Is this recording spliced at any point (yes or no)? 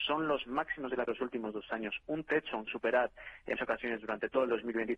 yes